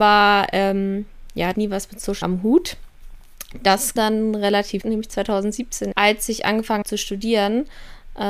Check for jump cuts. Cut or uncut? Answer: cut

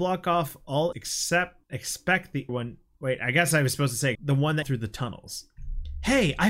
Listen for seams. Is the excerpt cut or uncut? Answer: cut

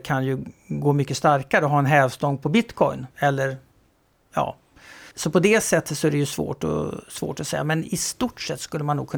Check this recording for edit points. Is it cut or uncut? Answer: cut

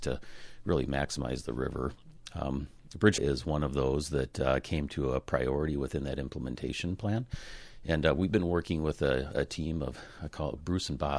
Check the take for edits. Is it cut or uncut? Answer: cut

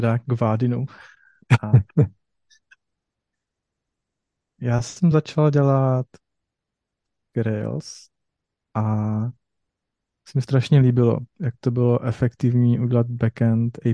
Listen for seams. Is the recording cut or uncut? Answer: uncut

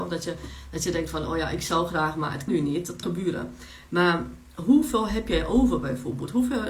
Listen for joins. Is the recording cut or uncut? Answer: cut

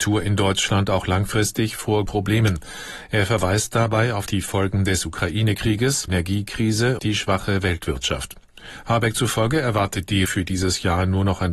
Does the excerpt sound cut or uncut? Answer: cut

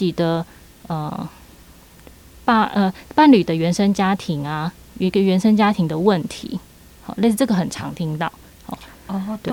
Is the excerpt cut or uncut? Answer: uncut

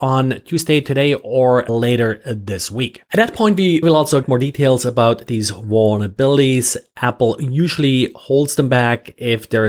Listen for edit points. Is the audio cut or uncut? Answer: cut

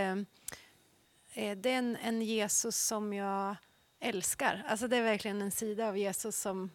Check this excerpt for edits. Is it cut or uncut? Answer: uncut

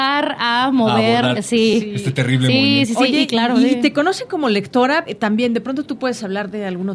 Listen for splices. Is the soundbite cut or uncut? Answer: cut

